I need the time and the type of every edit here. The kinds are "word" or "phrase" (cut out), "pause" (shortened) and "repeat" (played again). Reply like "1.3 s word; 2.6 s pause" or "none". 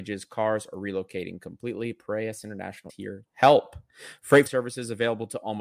2.9 s word; 3.3 s word; 4.5 s word